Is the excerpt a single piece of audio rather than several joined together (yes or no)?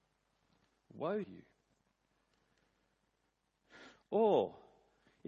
no